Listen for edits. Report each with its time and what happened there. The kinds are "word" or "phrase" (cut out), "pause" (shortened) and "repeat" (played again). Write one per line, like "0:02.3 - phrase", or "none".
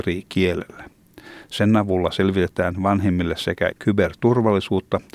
0:03.7 - word